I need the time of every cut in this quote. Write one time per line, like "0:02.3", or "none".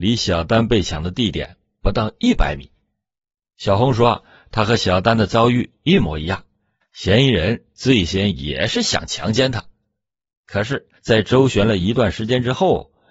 0:11.0